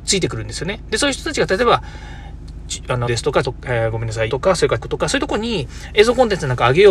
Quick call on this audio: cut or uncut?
cut